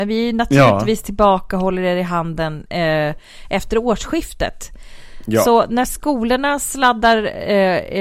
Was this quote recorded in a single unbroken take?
yes; 0 cuts

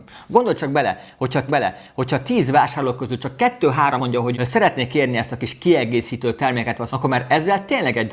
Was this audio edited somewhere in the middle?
yes; 4 cuts; at 1.5 s, 4.0 s, 4.3 s, 6.9 s

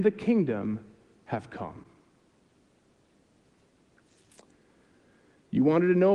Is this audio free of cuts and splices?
yes; 0 cuts

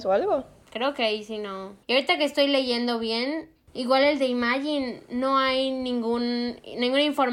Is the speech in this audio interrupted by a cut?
yes; 1 cut; at 1.8 s

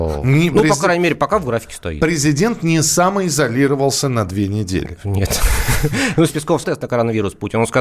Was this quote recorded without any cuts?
no; 2 cuts; at 6.3 s, 6.6 s

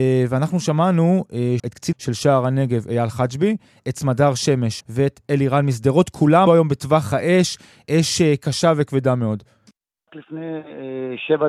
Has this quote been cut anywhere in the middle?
yes; 4 cuts; at 1.6 s, 1.9 s, 4.8 s, 6.5 s

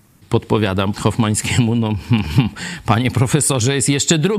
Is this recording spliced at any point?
yes; 1 cut; at 0.9 s

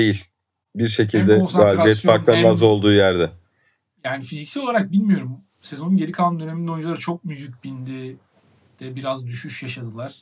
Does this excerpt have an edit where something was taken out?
no; 0 cuts

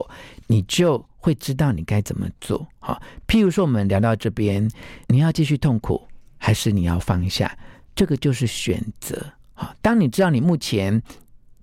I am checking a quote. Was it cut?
yes; 1 cut; at 5.0 s

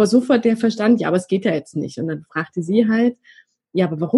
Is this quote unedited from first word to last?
yes; 0 cuts

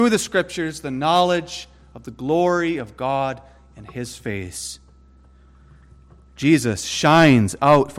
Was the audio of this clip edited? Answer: no; 0 cuts

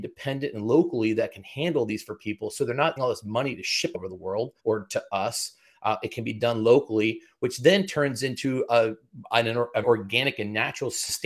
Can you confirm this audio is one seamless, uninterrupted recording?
no; 4 cuts; at 3.0 s, 3.9 s, 4.6 s, 9.8 s

